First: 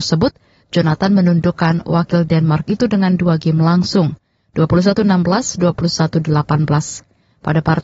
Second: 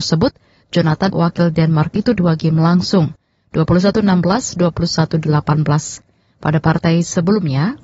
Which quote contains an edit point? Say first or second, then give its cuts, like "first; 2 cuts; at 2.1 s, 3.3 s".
second; 2 cuts; at 1.1 s, 2.2 s